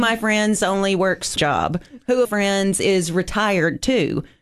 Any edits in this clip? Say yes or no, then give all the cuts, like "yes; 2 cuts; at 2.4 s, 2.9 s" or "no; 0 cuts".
yes; 2 cuts; at 1.4 s, 2.2 s